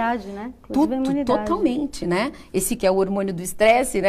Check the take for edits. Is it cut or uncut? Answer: cut